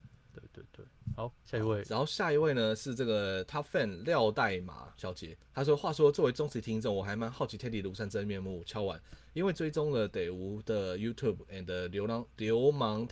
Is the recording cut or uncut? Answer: cut